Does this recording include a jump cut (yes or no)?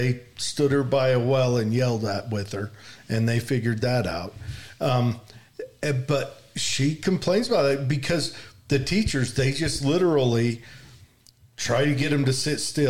no